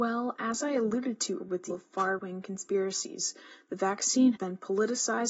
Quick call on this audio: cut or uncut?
cut